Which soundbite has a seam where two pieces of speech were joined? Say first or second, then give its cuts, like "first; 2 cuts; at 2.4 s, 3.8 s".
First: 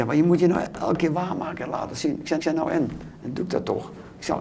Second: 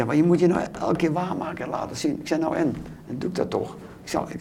first; 1 cut; at 2.4 s